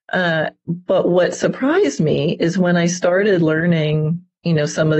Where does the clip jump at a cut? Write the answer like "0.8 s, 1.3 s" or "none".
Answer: none